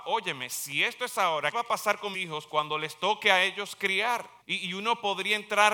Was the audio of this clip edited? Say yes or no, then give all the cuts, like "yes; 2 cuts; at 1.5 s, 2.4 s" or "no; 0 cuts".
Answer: yes; 3 cuts; at 1.5 s, 2.1 s, 4.4 s